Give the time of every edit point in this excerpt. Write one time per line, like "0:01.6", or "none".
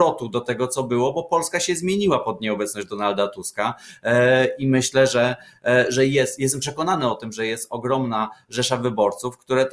none